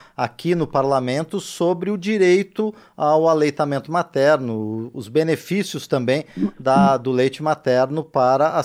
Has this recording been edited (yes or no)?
no